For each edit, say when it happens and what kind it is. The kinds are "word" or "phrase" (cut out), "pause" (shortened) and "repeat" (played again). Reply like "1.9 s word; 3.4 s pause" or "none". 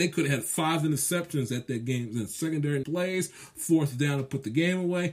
2.8 s word